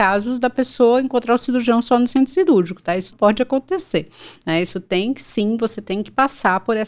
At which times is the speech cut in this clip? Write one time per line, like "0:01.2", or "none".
0:03.1